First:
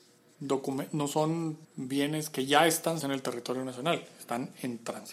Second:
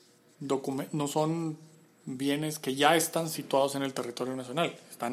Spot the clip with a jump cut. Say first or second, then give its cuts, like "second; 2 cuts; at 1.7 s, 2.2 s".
first; 2 cuts; at 1.6 s, 3.0 s